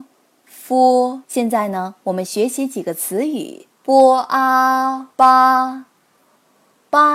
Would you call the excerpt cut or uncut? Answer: cut